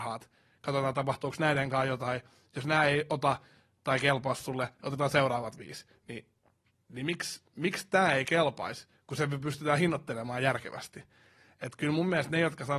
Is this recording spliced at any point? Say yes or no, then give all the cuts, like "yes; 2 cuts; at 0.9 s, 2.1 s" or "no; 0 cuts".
no; 0 cuts